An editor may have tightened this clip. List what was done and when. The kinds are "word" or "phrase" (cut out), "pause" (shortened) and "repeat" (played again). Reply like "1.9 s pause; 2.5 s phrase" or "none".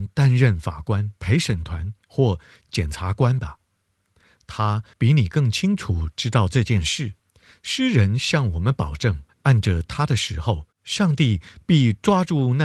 1.2 s pause; 2.0 s pause; 4.9 s pause; 7.2 s pause; 9.3 s pause; 10.7 s pause